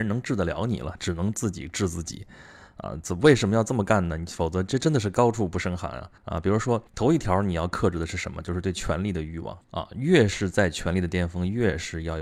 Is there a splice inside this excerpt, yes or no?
yes